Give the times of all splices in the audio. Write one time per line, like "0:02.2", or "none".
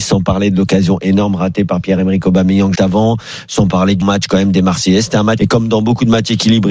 0:02.8
0:04.0
0:05.4